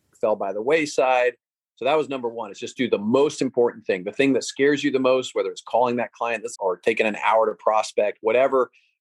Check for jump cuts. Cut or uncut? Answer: cut